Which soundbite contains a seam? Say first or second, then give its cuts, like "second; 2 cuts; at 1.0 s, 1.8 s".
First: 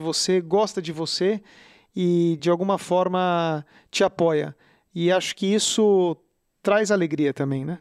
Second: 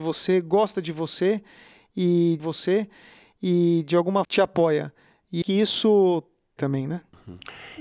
second; 4 cuts; at 2.4 s, 4.2 s, 5.4 s, 6.6 s